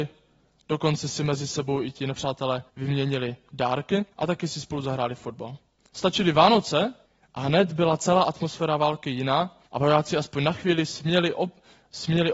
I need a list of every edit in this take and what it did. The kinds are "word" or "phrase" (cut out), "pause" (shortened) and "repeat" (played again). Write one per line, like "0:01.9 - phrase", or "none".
0:02.7 - pause
0:04.1 - pause
0:05.8 - pause
0:07.1 - pause
0:09.7 - pause